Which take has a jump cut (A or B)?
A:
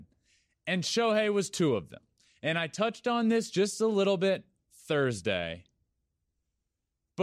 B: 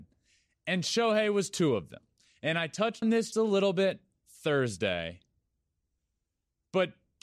B